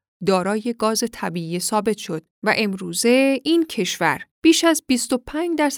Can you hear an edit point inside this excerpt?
yes; 1 cut; at 4.3 s

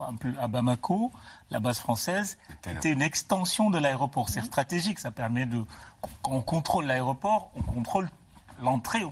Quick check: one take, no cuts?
yes; 0 cuts

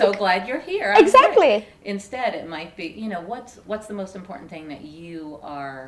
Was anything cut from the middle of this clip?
no; 0 cuts

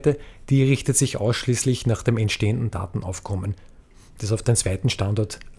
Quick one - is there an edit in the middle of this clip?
no; 0 cuts

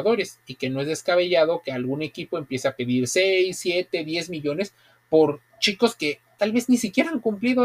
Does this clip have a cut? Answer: no; 0 cuts

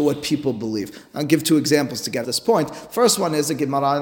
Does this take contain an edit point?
yes; 1 cut; at 2.2 s

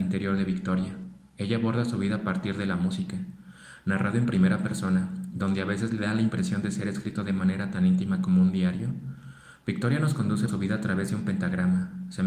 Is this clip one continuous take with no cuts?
no; 1 cut; at 10.5 s

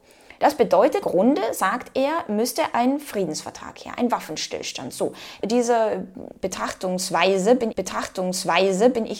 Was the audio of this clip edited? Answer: yes; 4 cuts; at 1.0 s, 2.7 s, 5.4 s, 7.7 s

